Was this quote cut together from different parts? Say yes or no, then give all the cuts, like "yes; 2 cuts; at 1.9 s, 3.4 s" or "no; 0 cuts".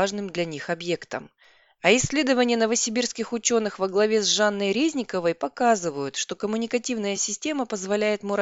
no; 0 cuts